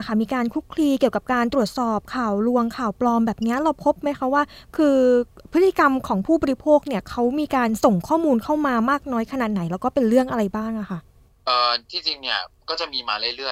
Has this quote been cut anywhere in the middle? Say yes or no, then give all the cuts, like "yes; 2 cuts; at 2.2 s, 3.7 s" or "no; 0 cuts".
no; 0 cuts